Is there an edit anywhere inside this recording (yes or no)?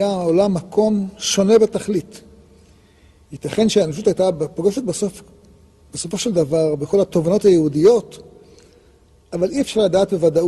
no